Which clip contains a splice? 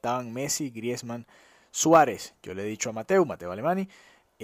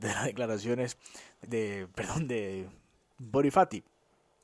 second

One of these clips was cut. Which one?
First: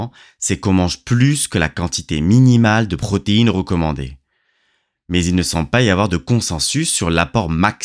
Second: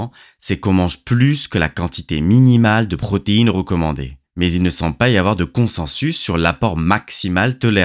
second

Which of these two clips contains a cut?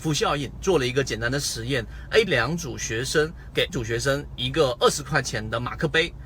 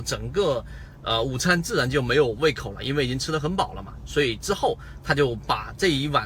first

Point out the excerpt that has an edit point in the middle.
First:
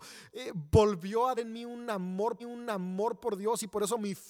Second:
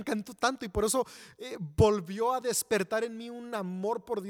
first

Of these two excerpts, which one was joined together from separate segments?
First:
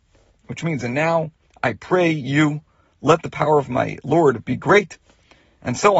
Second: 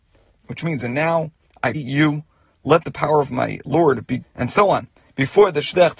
second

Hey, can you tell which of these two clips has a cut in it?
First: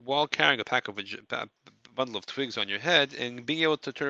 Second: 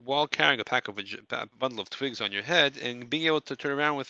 second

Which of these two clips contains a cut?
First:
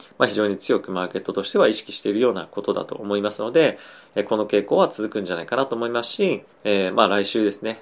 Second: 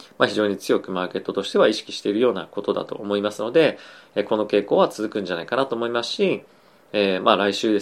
first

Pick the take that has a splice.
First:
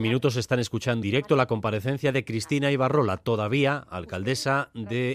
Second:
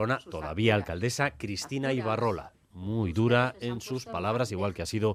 first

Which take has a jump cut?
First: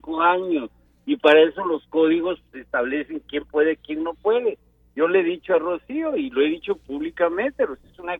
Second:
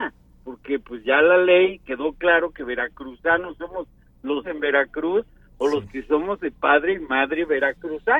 second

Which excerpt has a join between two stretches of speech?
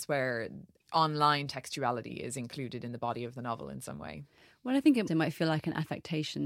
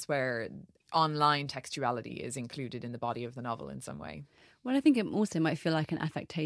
first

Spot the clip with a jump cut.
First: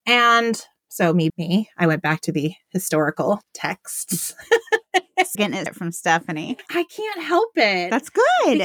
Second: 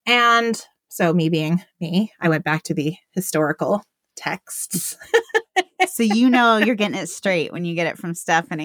first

